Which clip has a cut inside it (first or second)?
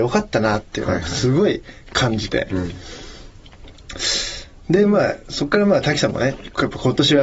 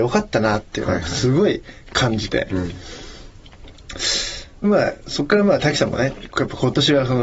second